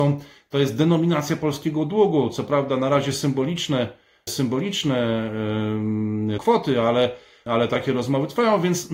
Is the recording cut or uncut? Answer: cut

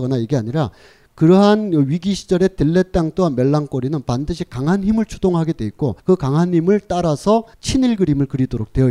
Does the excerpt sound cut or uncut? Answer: cut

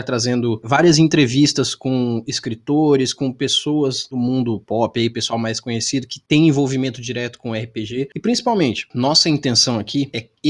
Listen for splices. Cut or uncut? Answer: uncut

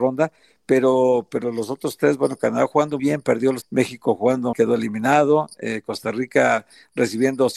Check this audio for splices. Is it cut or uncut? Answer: cut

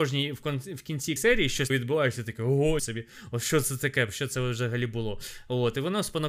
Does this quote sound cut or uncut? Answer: cut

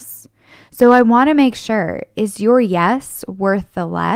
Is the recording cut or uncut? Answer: uncut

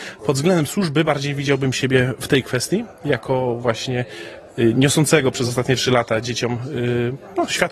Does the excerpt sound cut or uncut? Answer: uncut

